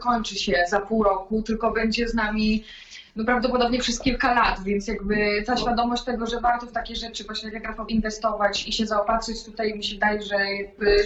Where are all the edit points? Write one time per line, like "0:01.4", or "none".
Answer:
0:07.9
0:08.7